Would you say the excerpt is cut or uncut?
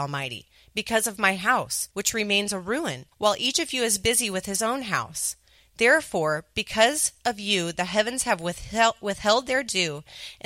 cut